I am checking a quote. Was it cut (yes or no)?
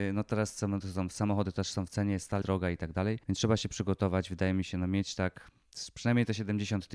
yes